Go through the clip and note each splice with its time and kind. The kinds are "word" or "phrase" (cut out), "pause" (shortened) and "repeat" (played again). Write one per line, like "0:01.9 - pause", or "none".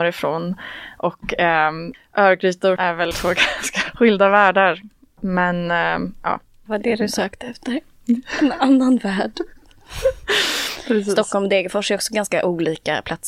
0:01.9 - word
0:02.8 - word
0:03.1 - word
0:03.9 - word
0:06.7 - word